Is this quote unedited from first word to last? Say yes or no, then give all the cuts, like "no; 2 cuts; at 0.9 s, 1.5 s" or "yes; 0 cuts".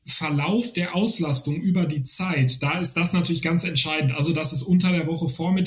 yes; 0 cuts